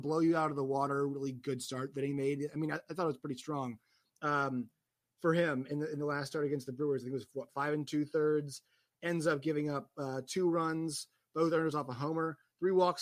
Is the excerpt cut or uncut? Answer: uncut